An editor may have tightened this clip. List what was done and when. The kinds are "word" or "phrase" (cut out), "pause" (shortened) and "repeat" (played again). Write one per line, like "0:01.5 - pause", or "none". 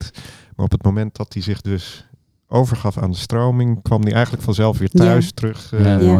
none